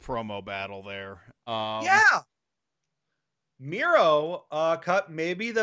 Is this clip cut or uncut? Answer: uncut